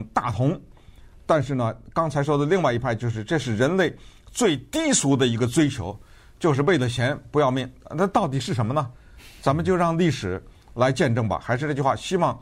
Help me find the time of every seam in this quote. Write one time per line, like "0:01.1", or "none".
none